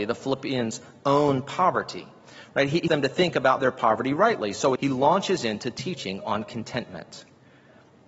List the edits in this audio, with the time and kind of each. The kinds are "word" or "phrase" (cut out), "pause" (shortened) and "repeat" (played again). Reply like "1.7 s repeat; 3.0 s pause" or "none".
2.9 s word; 4.8 s word